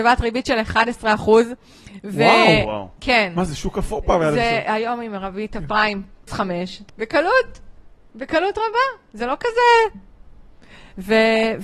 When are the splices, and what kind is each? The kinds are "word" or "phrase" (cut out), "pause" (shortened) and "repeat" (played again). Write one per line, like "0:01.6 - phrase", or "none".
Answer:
0:06.3 - word
0:06.9 - word